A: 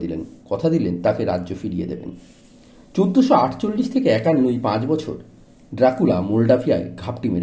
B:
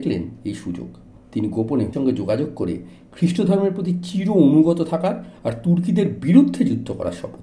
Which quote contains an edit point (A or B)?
B